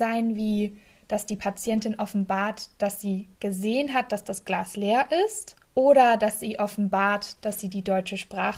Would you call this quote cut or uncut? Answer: cut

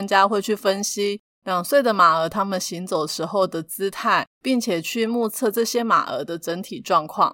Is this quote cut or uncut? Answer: cut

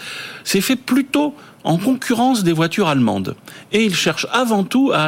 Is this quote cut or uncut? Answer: uncut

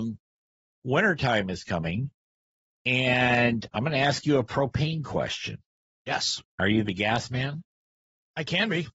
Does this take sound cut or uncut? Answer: uncut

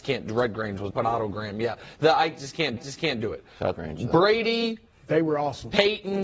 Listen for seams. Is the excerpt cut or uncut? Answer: cut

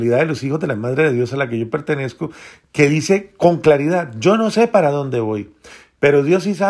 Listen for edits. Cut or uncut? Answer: uncut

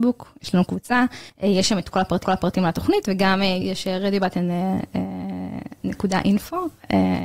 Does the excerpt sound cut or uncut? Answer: cut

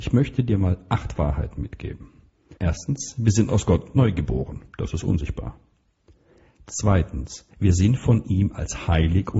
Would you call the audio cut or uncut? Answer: cut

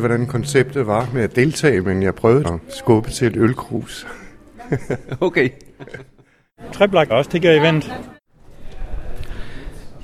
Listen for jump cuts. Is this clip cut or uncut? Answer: cut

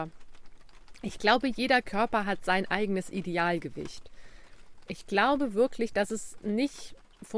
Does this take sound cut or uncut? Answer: uncut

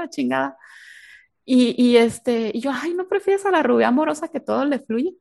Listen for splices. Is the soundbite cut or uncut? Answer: uncut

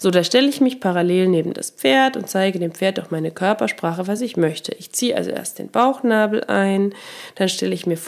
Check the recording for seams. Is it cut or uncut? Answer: uncut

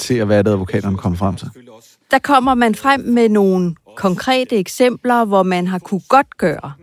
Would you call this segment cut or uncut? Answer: uncut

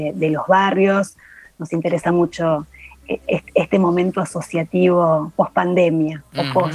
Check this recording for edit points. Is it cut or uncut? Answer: uncut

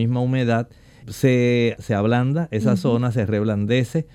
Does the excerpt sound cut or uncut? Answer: cut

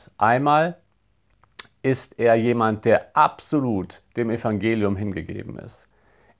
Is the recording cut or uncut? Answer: uncut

